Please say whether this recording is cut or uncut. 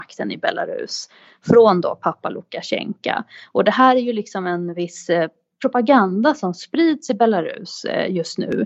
uncut